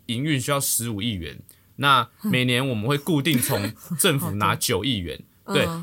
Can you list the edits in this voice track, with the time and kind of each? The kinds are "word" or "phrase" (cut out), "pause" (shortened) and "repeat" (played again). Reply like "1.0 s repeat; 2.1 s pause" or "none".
none